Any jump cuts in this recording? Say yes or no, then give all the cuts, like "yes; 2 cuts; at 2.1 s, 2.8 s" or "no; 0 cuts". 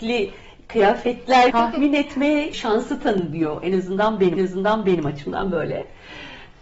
yes; 3 cuts; at 1.5 s, 2.5 s, 4.4 s